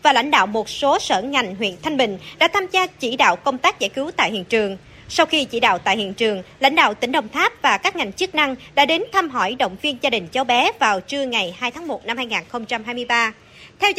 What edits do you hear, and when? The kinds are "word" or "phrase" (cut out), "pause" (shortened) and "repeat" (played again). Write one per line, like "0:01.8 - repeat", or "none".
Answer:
none